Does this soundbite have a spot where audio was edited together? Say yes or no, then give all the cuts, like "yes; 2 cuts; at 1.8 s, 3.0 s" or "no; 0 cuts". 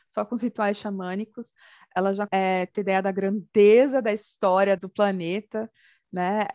yes; 3 cuts; at 2.3 s, 2.7 s, 4.8 s